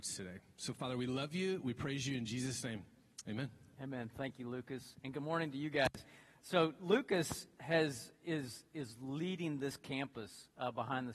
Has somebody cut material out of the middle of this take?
no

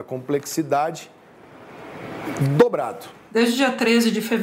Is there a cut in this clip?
no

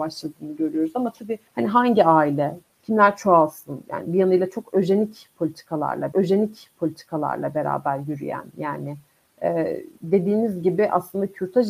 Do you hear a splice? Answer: yes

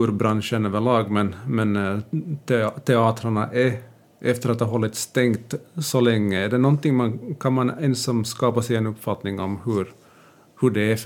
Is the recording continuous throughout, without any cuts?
no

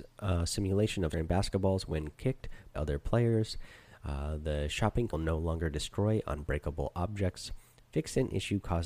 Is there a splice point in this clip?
yes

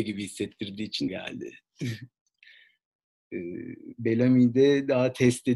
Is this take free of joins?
no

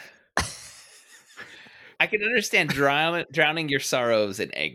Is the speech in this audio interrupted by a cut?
yes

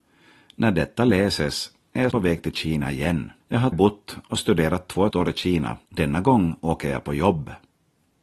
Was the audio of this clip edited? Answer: yes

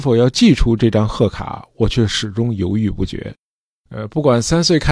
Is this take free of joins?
yes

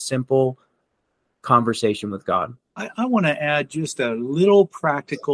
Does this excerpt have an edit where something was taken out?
yes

